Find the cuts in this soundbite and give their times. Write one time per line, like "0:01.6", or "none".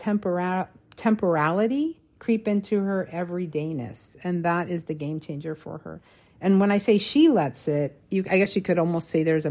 none

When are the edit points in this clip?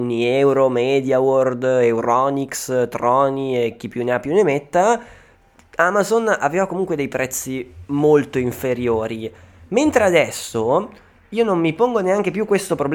none

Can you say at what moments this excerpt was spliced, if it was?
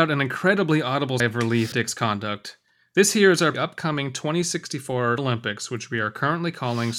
0:01.2
0:01.7
0:03.5
0:05.2

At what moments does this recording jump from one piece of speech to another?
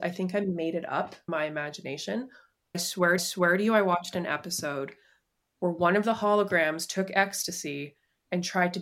0:01.3
0:02.7
0:03.2

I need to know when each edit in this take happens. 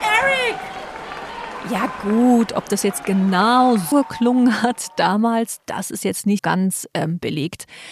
0:03.9
0:06.4

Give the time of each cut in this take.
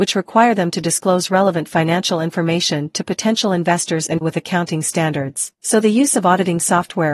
0:04.2
0:05.5

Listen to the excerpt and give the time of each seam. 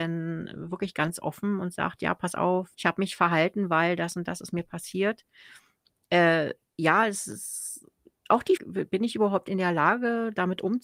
0:02.7
0:08.6

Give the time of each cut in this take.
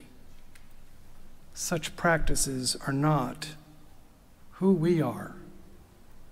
none

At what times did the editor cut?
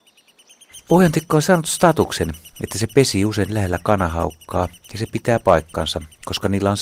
none

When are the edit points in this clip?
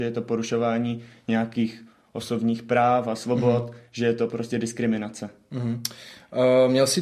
none

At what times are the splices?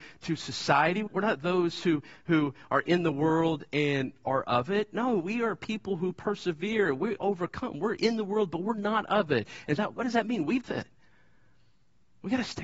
0:01.1
0:09.8
0:10.6

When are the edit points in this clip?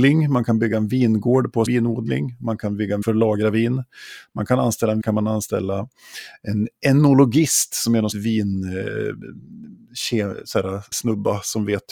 0:01.7
0:03.0
0:05.0
0:08.1
0:10.9

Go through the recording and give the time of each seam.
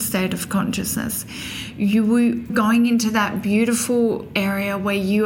0:02.5

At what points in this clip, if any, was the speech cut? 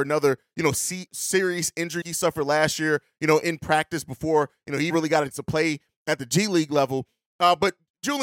0:01.1
0:02.0
0:04.9
0:05.3

